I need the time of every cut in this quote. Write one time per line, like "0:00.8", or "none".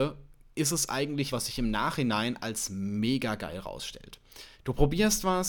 0:01.3
0:04.5